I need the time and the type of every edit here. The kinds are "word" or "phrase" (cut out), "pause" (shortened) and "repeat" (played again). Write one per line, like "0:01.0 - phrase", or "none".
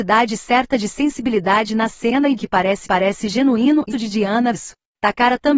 0:02.4 - word
0:02.8 - repeat
0:03.9 - phrase
0:04.5 - word